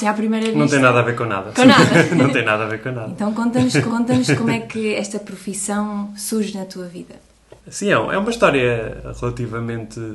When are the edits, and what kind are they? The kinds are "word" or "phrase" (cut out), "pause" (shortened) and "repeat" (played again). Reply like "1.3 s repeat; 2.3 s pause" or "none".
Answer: 3.9 s repeat; 7.6 s pause